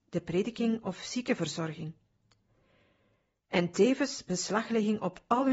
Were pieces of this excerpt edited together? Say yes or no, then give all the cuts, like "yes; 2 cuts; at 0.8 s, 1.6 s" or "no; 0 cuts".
no; 0 cuts